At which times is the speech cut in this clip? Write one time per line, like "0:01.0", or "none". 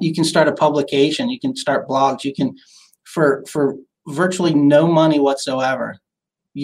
none